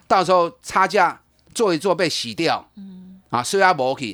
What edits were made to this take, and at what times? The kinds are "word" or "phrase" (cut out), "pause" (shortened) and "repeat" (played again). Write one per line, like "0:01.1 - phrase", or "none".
none